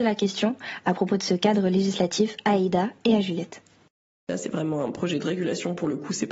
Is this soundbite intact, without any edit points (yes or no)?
yes